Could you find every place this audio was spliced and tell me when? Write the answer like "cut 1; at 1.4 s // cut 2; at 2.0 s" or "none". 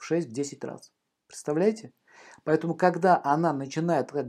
none